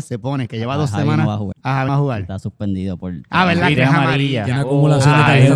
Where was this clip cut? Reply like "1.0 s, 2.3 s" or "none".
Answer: 1.5 s, 1.9 s, 3.7 s